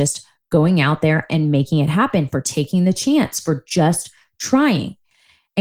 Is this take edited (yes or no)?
no